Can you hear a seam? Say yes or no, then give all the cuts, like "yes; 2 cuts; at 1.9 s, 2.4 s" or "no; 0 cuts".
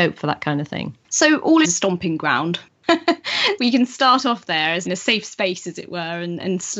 yes; 4 cuts; at 1.0 s, 1.6 s, 3.6 s, 4.9 s